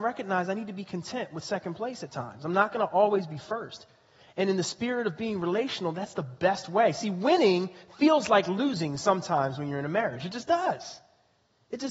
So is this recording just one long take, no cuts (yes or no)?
yes